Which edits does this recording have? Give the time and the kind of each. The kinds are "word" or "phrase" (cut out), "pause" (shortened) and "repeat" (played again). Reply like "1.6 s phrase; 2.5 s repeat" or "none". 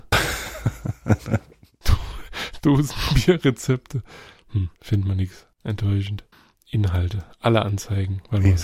1.8 s word; 4.8 s pause; 5.5 s pause